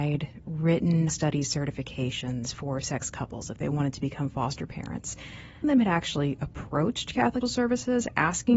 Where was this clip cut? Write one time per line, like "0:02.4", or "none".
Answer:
0:01.1
0:02.8
0:05.6
0:07.4